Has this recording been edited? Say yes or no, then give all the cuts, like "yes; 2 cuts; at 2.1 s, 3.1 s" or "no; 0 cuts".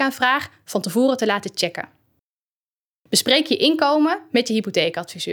no; 0 cuts